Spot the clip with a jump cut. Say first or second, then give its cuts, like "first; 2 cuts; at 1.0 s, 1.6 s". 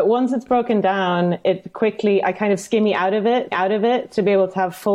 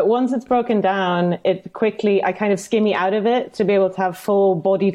first; 1 cut; at 3.5 s